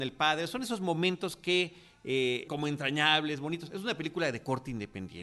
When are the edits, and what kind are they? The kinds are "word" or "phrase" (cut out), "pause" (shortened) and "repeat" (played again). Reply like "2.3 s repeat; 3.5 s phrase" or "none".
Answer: 2.5 s word